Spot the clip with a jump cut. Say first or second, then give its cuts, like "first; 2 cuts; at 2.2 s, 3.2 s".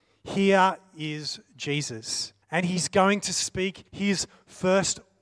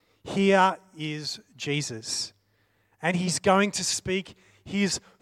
first; 2 cuts; at 2.4 s, 3.9 s